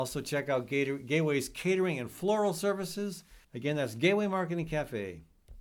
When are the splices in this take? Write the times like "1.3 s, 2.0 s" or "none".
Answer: 3.4 s